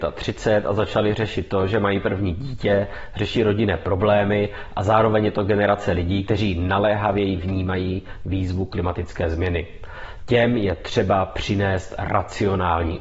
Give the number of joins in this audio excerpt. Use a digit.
0